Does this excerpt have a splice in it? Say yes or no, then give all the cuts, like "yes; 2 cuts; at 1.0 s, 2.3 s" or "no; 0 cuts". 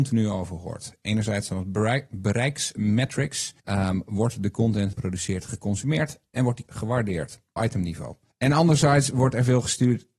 yes; 5 cuts; at 3.6 s, 4.9 s, 6.7 s, 7.6 s, 8.3 s